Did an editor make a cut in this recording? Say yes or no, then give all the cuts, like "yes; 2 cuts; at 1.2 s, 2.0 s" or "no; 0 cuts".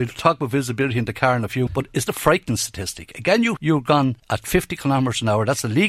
yes; 4 cuts; at 1.7 s, 2.1 s, 3.6 s, 4.2 s